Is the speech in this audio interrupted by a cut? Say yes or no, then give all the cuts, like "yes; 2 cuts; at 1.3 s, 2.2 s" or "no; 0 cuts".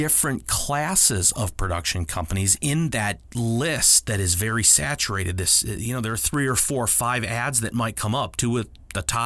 no; 0 cuts